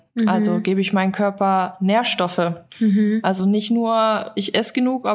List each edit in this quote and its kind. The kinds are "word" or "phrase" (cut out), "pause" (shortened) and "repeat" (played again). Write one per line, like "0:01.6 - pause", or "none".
none

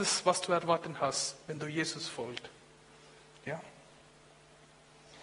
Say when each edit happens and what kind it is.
none

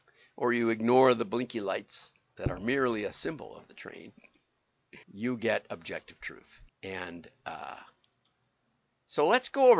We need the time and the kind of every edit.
0:05.0 - pause
0:06.7 - pause

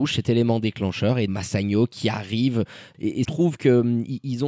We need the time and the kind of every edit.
0:01.3 - word
0:03.2 - phrase

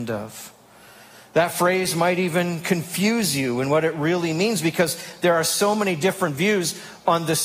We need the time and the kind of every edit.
none

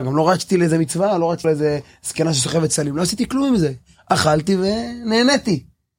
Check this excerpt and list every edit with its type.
0:01.4 - word

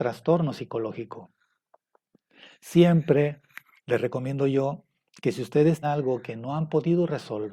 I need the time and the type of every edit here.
0:05.8 - word

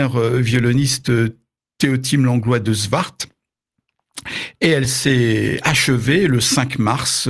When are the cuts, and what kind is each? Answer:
none

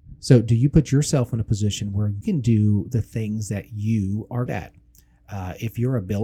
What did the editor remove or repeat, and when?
0:02.2 - word
0:04.5 - word

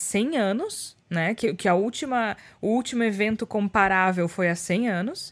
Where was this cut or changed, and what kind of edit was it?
0:01.0 - pause

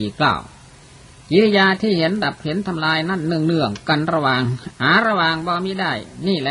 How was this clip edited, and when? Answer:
0:04.7 - pause

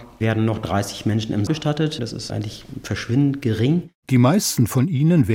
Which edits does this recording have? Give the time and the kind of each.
0:01.5 - word
0:02.3 - word
0:04.0 - pause

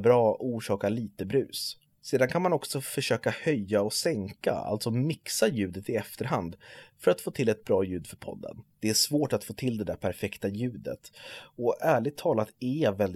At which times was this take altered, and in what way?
0:01.9 - pause
0:08.7 - pause

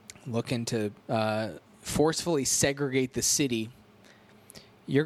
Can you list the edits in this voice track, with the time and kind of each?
0:01.0 - pause

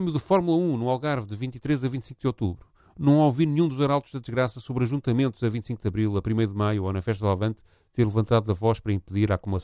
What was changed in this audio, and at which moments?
none

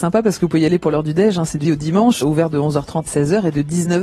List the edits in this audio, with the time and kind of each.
0:01.6 - word
0:02.2 - word
0:03.1 - word

